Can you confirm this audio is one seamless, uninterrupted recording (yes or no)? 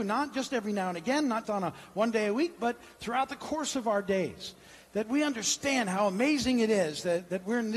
no